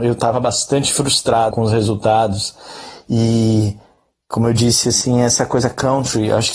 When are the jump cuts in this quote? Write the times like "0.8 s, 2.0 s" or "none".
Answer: 1.5 s

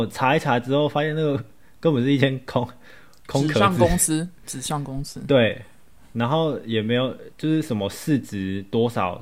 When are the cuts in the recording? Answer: none

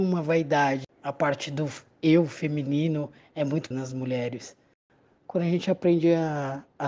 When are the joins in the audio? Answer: 3.7 s

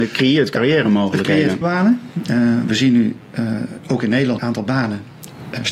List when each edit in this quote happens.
1.6 s, 4.4 s

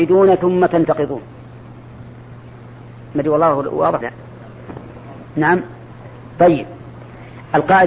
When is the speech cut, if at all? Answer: 4.0 s, 6.3 s

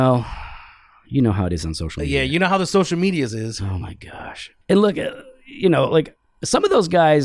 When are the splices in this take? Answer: 4.6 s

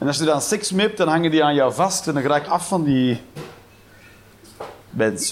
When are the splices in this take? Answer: 2.5 s

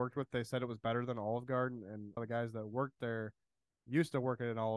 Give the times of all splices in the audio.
2.2 s

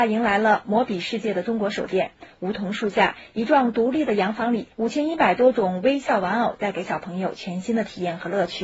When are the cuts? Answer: 4.7 s

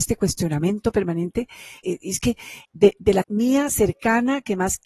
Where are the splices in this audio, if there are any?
1.8 s, 2.6 s, 3.2 s

